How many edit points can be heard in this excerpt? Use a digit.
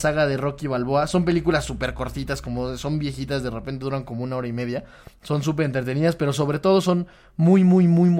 0